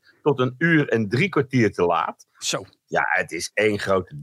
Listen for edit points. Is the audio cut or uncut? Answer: uncut